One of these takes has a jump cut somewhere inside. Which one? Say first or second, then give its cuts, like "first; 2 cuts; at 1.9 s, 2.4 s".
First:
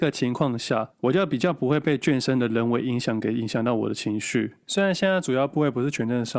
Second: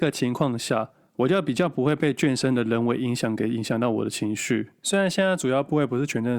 first; 1 cut; at 0.9 s